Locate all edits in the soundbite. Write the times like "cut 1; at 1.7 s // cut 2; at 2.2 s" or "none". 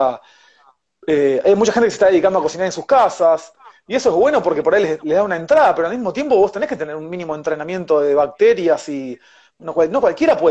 none